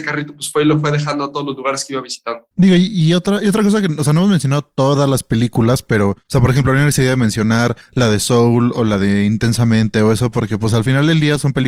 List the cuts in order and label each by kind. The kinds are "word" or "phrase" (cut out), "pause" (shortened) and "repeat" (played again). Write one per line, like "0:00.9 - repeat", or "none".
0:02.5 - pause